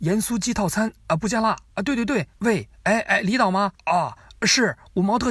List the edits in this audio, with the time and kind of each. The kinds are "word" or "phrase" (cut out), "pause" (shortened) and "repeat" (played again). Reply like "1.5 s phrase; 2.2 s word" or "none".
2.3 s pause; 3.7 s pause